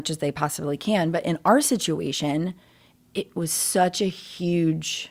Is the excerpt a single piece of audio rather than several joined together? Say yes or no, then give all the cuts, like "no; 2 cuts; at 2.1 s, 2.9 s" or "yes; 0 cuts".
yes; 0 cuts